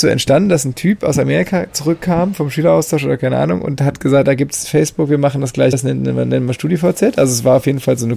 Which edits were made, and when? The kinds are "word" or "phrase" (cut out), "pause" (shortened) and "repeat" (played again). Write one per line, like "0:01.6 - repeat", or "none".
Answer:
0:04.2 - word
0:05.7 - word